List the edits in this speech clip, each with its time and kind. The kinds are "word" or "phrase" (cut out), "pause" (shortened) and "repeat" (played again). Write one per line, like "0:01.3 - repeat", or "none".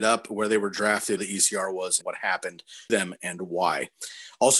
0:01.2 - word
0:02.0 - word
0:02.9 - word